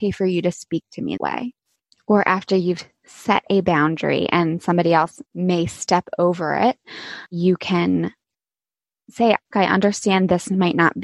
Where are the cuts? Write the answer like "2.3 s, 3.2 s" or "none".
1.2 s, 5.3 s, 7.3 s, 9.5 s